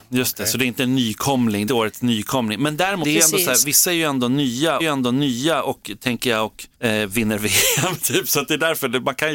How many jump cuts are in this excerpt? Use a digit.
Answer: 4